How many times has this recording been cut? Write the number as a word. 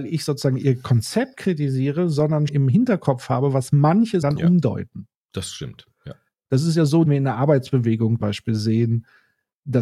four